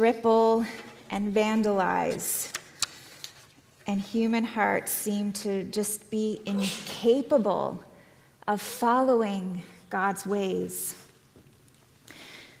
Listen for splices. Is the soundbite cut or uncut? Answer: uncut